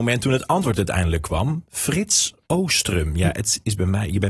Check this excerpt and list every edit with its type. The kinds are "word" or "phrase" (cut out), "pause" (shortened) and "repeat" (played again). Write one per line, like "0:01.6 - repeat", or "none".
0:02.4 - word